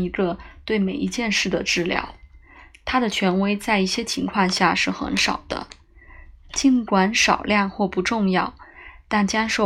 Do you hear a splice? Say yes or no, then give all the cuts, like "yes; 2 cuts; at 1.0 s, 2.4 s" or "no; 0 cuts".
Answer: no; 0 cuts